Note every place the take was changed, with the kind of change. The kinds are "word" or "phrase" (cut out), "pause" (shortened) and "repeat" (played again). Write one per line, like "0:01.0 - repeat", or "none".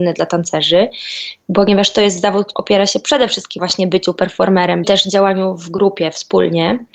0:02.5 - word
0:03.6 - word
0:04.8 - phrase